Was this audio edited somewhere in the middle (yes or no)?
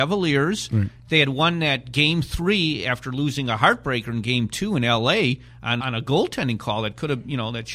yes